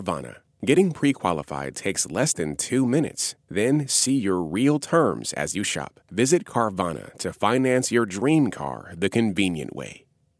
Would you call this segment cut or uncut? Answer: cut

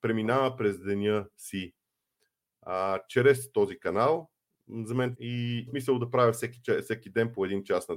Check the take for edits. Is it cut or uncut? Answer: cut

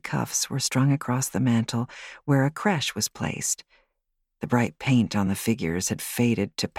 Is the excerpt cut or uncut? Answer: uncut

